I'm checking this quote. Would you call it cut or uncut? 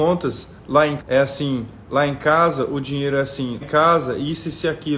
cut